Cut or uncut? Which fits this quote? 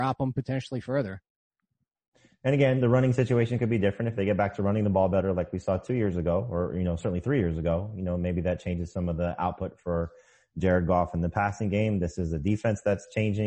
uncut